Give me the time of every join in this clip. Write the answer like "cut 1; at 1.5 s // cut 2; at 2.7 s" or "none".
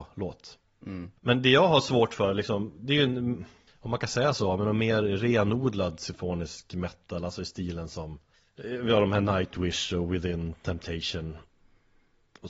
cut 1; at 1.2 s // cut 2; at 3.7 s // cut 3; at 8.3 s